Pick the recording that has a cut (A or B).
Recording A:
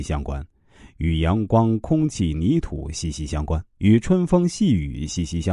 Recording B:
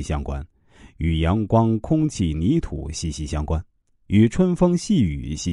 A